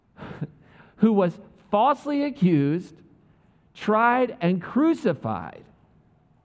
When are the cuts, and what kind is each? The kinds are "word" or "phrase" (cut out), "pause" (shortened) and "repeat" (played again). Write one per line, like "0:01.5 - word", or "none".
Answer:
none